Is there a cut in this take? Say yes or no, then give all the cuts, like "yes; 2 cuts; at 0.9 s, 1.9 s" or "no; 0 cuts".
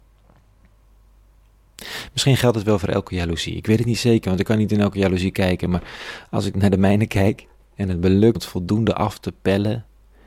yes; 1 cut; at 8.3 s